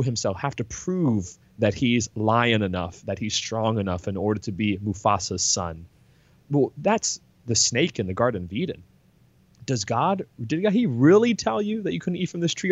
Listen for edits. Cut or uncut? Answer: uncut